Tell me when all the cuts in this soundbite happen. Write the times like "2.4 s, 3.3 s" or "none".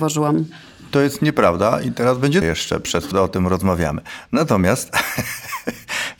2.4 s, 3.1 s